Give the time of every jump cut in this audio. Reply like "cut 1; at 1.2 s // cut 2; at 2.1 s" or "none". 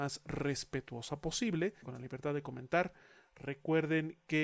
cut 1; at 1.8 s